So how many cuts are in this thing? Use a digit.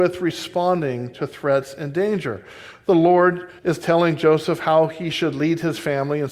1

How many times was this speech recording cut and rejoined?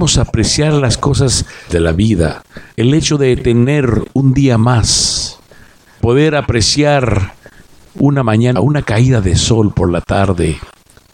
4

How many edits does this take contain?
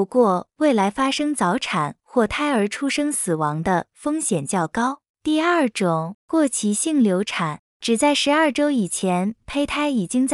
3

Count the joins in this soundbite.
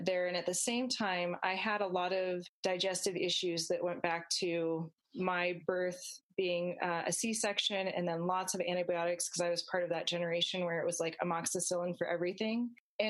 0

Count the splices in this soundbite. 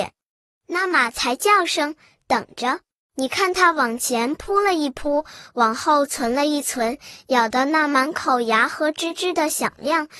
1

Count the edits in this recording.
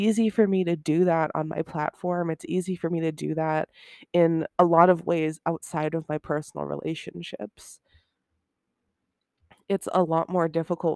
0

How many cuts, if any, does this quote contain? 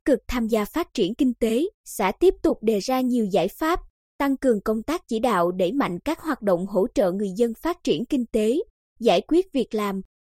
1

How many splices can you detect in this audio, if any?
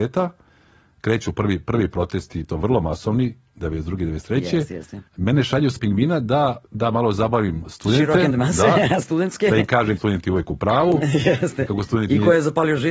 6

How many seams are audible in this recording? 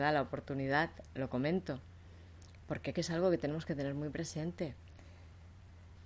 1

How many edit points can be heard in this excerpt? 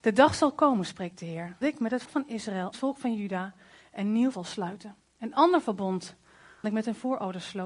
6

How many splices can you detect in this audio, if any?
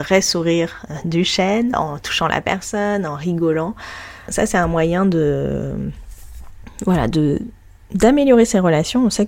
0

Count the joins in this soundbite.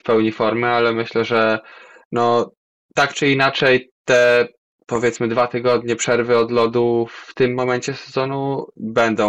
0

